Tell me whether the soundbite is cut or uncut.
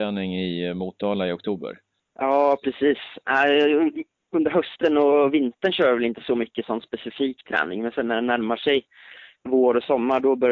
uncut